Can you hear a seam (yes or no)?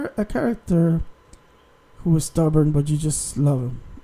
no